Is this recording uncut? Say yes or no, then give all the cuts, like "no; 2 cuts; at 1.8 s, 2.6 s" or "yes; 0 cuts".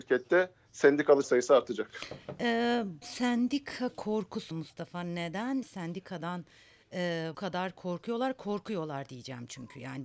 no; 5 cuts; at 1.2 s, 3.0 s, 4.5 s, 5.6 s, 7.3 s